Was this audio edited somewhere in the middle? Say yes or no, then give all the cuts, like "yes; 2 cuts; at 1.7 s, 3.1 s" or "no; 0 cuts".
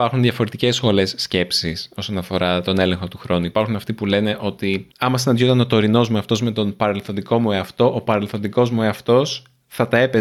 yes; 1 cut; at 4.9 s